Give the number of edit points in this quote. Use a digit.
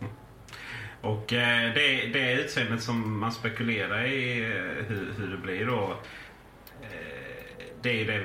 0